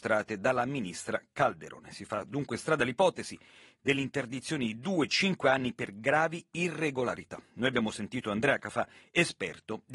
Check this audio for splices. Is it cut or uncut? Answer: uncut